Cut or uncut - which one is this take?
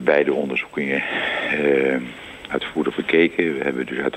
cut